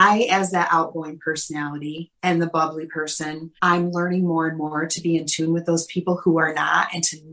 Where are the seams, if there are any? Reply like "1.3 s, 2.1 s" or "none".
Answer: 3.6 s